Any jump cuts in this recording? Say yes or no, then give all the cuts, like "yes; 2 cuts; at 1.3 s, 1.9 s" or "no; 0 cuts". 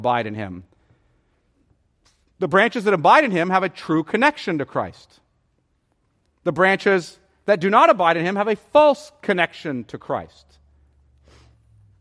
no; 0 cuts